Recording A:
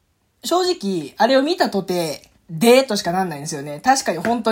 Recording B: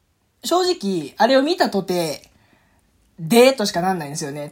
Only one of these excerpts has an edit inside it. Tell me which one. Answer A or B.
A